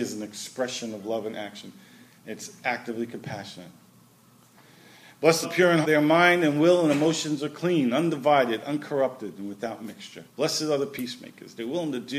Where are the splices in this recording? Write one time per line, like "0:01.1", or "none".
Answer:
0:05.4
0:05.8
0:10.3